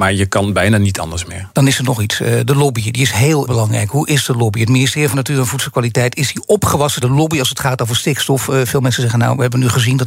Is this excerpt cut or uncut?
cut